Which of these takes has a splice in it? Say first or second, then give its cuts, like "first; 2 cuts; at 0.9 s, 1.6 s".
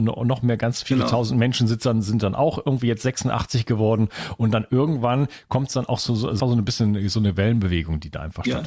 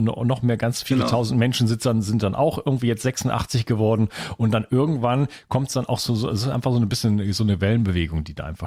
first; 1 cut; at 6.4 s